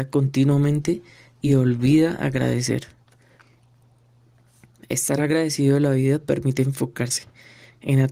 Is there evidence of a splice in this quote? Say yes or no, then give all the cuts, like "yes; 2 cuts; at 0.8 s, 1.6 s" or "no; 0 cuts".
no; 0 cuts